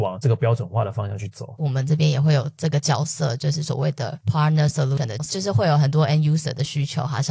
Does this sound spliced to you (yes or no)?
no